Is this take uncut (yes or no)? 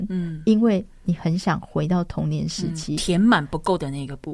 yes